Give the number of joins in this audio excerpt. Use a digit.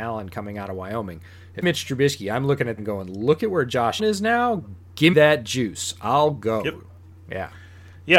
4